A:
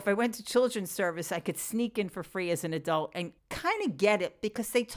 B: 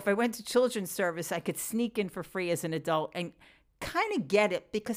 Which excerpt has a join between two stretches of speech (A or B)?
A